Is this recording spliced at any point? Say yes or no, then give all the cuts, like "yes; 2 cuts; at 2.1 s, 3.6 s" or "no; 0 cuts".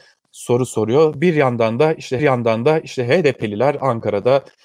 yes; 1 cut; at 2.2 s